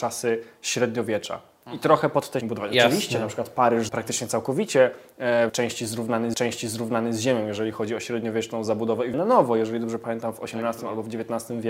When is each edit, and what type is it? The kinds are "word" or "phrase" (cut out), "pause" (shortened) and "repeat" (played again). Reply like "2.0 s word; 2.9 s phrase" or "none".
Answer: 2.4 s phrase; 3.9 s word; 5.5 s word; 6.3 s repeat; 9.1 s word